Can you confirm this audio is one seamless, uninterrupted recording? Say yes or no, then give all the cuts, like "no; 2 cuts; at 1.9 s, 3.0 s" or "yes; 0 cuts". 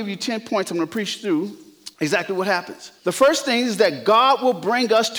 no; 2 cuts; at 1.9 s, 3.0 s